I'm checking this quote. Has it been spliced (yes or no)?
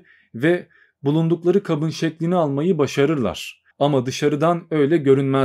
yes